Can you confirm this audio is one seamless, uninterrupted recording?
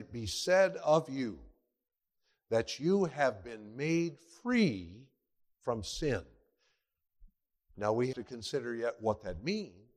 no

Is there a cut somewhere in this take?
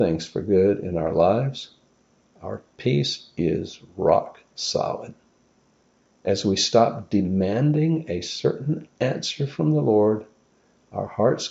no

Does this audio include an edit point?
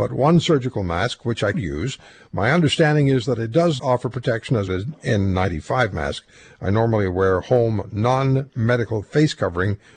yes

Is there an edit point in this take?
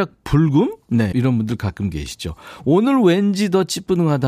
yes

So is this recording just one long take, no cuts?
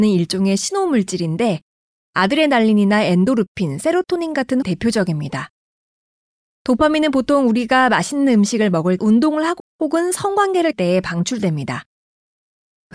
no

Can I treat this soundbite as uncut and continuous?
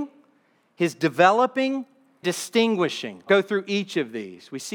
no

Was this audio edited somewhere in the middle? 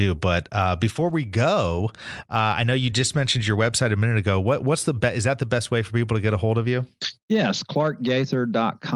no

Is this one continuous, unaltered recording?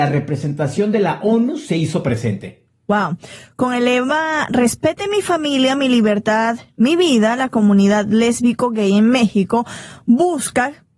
yes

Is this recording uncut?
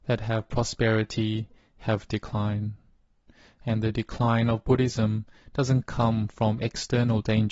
yes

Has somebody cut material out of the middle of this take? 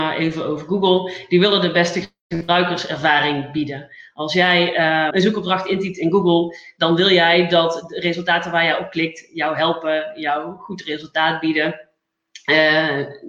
yes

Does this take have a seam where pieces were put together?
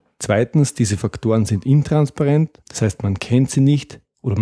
yes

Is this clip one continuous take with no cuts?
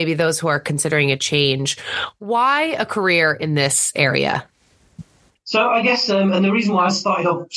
yes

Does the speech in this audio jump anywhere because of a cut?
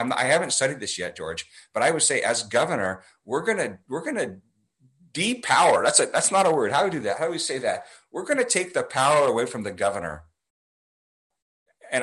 no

